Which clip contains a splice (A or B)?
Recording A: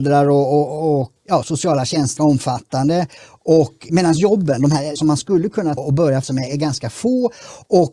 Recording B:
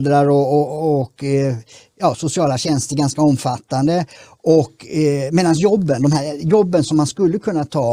A